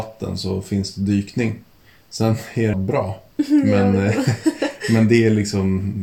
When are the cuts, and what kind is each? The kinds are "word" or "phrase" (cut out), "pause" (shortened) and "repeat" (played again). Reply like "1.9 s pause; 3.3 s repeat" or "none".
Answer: 2.7 s phrase